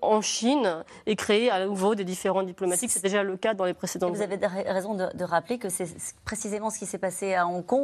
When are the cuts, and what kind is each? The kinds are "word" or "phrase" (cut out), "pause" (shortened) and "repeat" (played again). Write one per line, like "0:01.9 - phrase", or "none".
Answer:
none